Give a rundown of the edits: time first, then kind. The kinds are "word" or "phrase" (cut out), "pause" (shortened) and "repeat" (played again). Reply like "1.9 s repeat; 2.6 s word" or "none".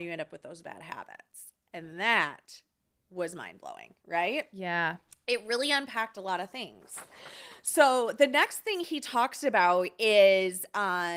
none

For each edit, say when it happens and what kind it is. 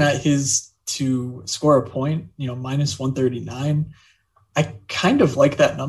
none

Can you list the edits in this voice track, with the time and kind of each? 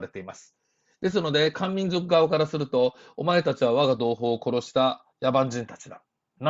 5.1 s pause

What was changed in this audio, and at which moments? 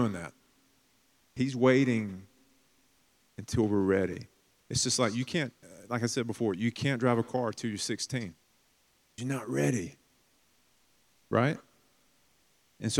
9.2 s word

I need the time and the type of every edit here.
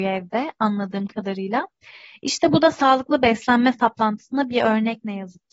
none

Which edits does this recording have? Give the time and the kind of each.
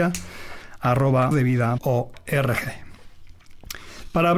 1.3 s word; 1.8 s word

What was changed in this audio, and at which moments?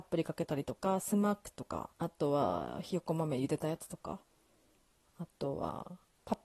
1.9 s pause

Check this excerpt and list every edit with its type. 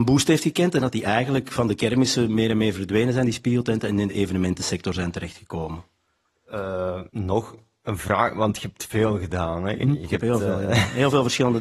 7.1 s pause; 9.8 s word

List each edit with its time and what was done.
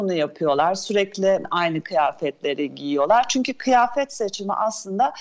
1.4 s word

